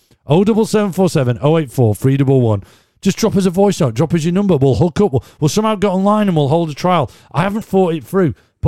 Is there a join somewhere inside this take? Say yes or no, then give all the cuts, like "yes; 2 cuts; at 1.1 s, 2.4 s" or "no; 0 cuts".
yes; 1 cut; at 7.6 s